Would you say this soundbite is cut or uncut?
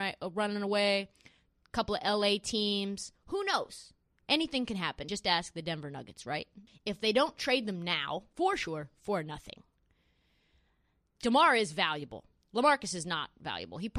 cut